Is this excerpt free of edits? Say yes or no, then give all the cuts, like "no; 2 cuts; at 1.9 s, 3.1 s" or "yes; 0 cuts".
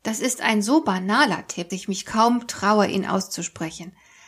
no; 1 cut; at 1.7 s